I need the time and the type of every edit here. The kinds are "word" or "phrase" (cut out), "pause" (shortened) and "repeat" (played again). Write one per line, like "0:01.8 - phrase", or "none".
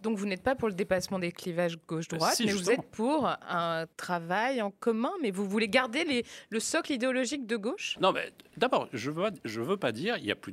0:03.9 - pause
0:08.0 - word